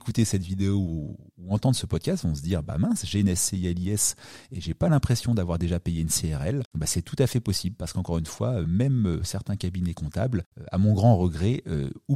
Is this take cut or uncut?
uncut